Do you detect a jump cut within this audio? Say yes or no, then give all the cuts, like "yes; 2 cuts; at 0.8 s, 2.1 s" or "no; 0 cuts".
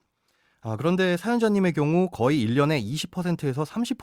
no; 0 cuts